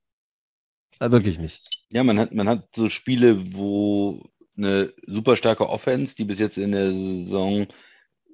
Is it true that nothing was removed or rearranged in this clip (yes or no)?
no